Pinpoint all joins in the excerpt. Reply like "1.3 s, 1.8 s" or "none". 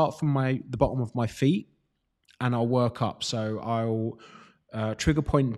none